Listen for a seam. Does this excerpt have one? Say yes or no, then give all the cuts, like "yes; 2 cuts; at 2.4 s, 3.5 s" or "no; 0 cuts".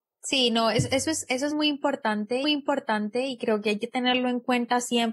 yes; 2 cuts; at 1.5 s, 2.4 s